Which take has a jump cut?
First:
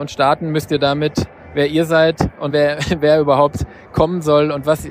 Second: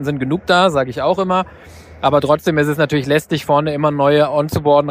first; 1 cut; at 2.5 s

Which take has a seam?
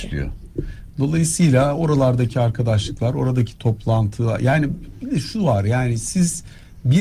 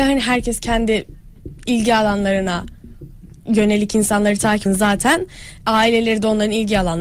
second; 1 cut; at 4.7 s

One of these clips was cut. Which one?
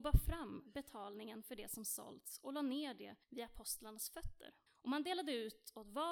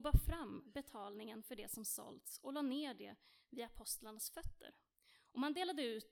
first; 2 cuts; at 3.2 s, 4.7 s

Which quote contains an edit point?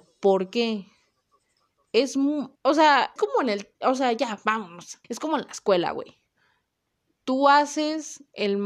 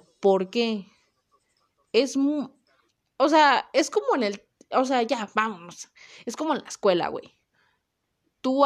first; 4 cuts; at 2.6 s, 3.2 s, 3.7 s, 5.0 s

